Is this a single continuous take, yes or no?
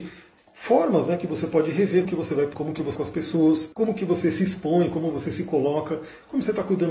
no